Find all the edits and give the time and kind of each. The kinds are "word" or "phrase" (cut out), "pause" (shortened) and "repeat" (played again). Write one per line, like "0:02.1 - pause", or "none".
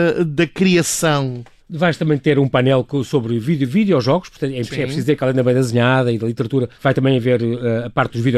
0:01.6 - pause
0:06.8 - pause

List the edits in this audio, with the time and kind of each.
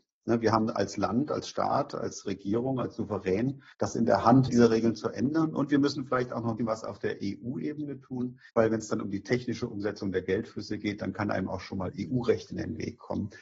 0:03.7 - pause
0:04.5 - word
0:06.6 - word
0:08.5 - pause

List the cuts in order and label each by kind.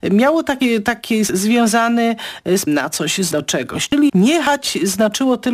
0:01.3 - word
0:02.7 - word
0:03.3 - word
0:04.1 - word

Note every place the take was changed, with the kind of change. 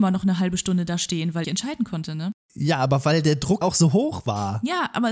0:01.4 - phrase
0:03.6 - word

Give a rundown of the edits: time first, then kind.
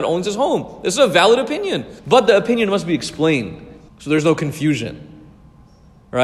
0:02.0 - pause
0:03.9 - pause

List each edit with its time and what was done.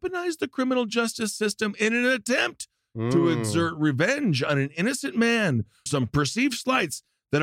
0:05.9 - word

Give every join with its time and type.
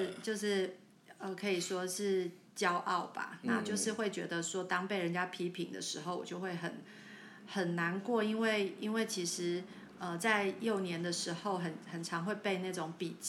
0:02.5 - pause

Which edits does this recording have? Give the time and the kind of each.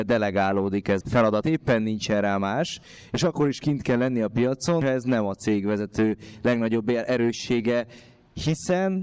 0:01.0 - word
0:01.4 - word
0:04.8 - word

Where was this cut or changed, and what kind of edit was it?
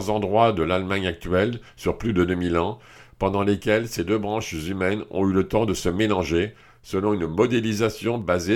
none

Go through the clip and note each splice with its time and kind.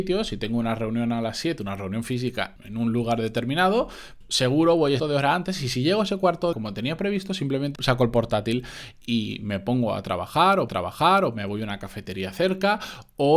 0:02.6 - word
0:04.2 - word
0:05.0 - phrase
0:06.5 - phrase
0:07.8 - word
0:10.7 - repeat

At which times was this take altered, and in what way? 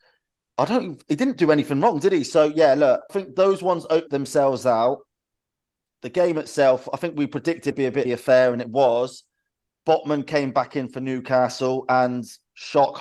0:03.1 - word
0:04.1 - word
0:07.7 - phrase
0:08.0 - phrase

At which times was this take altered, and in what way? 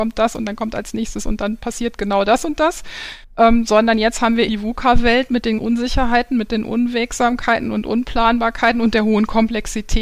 0:03.2 - pause
0:04.5 - word
0:05.6 - word

